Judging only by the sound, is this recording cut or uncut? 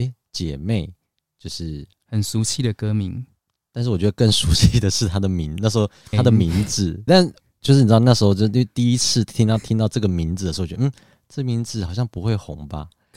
cut